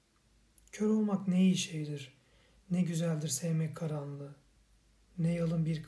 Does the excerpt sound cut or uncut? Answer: uncut